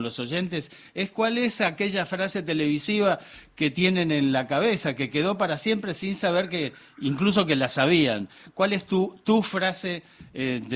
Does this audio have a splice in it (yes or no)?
no